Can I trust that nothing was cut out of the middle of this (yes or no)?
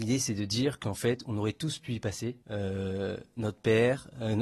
no